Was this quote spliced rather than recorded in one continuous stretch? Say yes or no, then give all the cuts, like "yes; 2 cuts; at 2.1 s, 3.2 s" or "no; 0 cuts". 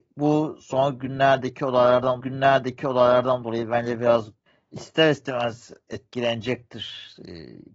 yes; 2 cuts; at 2.2 s, 4.5 s